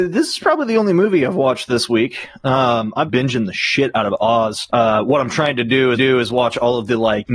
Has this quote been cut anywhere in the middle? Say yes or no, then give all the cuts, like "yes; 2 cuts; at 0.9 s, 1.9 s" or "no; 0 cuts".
yes; 2 cuts; at 3.1 s, 5.9 s